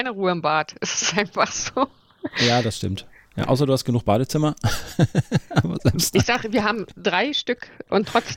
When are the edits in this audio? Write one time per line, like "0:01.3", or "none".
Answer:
none

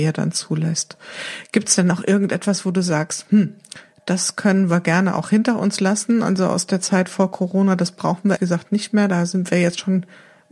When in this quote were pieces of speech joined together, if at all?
0:08.4

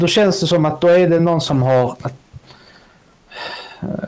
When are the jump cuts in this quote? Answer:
none

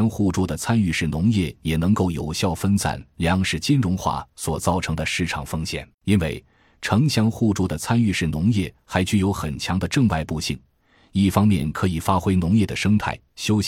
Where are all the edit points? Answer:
0:05.9

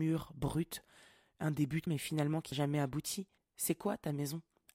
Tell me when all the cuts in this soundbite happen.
0:01.9
0:02.5
0:03.4

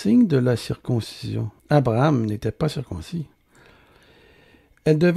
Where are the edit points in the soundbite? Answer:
0:01.6

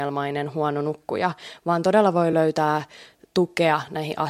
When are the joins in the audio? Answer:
none

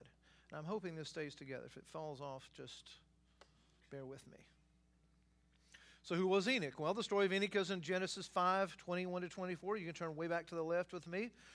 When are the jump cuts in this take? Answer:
none

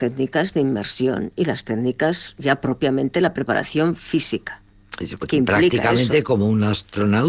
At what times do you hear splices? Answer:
none

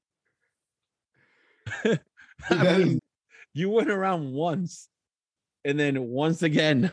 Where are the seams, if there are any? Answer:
0:03.0

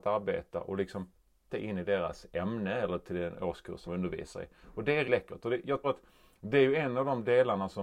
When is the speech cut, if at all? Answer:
0:01.5
0:03.9
0:05.0
0:05.8

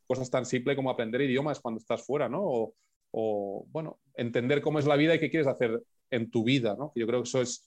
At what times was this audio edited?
none

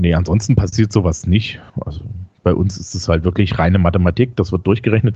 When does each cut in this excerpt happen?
0:01.7

